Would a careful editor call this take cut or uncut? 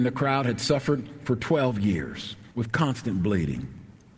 cut